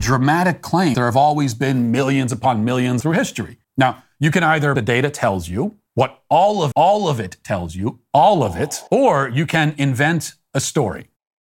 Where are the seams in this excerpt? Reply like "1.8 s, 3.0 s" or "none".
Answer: 0.9 s, 3.0 s, 3.6 s, 4.8 s, 5.9 s, 6.7 s, 8.9 s